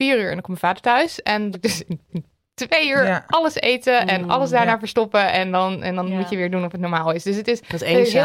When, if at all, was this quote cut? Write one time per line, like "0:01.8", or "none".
0:01.5
0:02.1